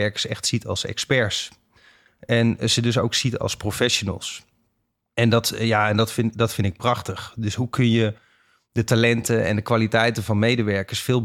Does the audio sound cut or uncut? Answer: uncut